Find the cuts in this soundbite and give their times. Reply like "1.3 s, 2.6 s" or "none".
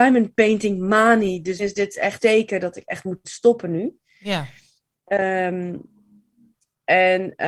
1.6 s, 2.2 s